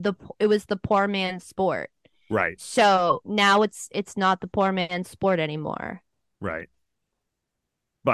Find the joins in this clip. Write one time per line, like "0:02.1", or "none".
none